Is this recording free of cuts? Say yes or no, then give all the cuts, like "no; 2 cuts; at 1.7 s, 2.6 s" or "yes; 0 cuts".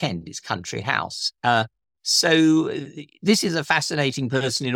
yes; 0 cuts